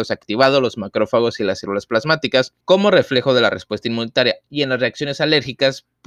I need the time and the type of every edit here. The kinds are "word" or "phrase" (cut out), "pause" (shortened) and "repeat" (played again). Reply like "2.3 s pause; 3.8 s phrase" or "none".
2.6 s pause

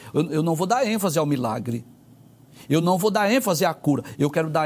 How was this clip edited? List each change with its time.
none

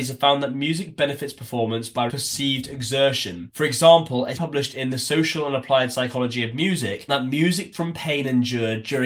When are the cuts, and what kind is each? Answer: 2.1 s word; 4.3 s word; 7.1 s word; 7.7 s word

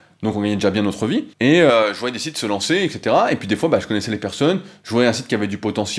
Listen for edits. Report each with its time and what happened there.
1.3 s pause

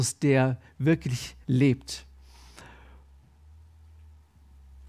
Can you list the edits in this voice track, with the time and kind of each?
1.4 s pause

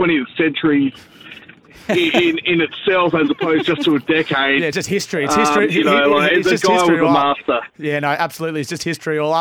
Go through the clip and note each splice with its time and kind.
none

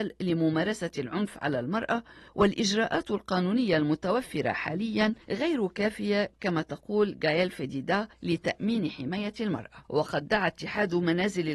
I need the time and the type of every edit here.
2.3 s pause; 5.2 s pause; 8.1 s pause; 9.8 s pause

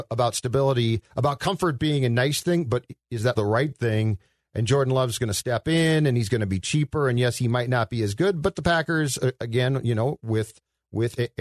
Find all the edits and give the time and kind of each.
3.3 s word

